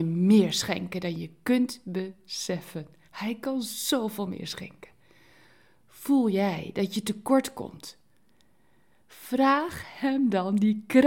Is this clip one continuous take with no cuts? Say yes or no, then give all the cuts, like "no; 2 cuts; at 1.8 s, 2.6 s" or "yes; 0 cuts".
yes; 0 cuts